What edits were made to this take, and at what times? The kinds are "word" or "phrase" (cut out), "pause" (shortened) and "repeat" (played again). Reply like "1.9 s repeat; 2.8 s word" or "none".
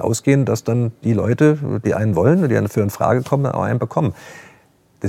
none